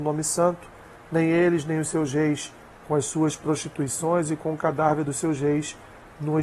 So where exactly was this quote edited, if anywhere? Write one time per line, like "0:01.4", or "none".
none